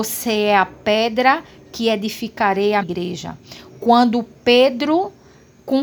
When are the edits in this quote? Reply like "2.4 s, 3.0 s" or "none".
2.8 s